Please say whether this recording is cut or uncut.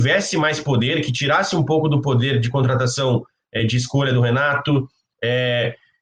uncut